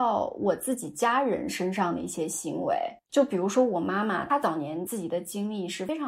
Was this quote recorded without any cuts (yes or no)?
yes